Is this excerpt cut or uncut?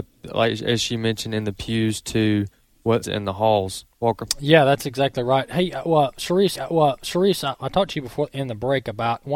cut